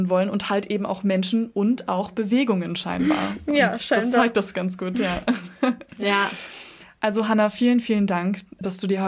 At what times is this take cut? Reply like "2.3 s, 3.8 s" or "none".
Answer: none